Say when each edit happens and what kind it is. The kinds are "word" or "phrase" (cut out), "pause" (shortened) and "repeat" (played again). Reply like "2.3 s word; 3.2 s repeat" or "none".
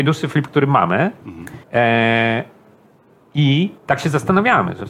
1.6 s pause; 3.8 s pause